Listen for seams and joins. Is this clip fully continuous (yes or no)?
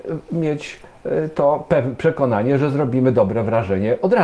yes